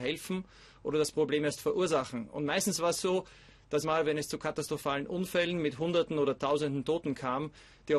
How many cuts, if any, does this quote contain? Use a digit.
1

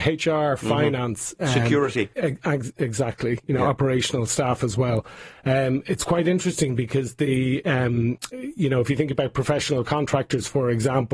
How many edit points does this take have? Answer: 1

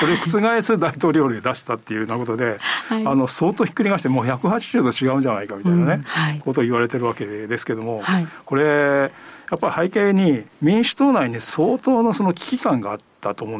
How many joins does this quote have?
1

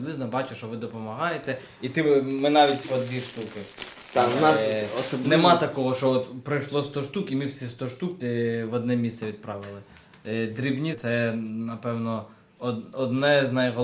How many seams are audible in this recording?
3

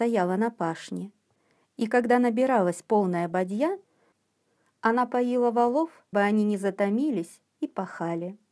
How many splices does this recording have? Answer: 1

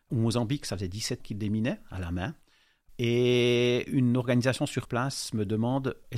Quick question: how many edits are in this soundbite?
1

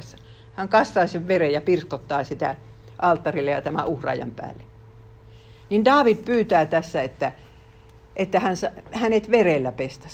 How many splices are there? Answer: 0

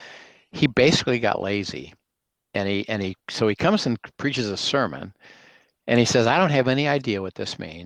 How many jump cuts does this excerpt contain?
0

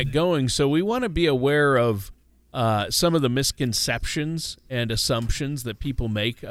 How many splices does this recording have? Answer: 0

